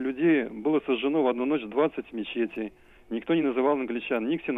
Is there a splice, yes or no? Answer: no